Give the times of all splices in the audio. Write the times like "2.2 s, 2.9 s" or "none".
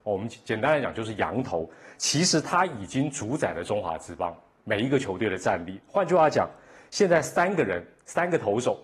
none

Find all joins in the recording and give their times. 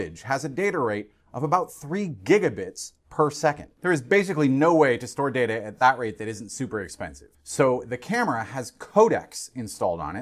3.7 s

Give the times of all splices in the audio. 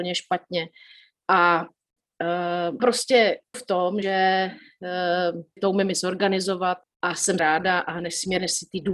2.8 s, 3.5 s, 4.0 s, 5.6 s, 6.8 s, 7.4 s

